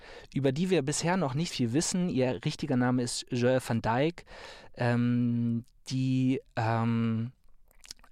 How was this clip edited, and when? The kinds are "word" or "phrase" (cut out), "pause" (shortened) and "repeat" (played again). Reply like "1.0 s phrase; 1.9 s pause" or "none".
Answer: 1.5 s word